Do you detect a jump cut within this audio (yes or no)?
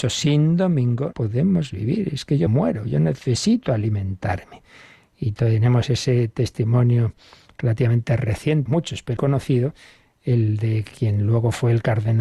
yes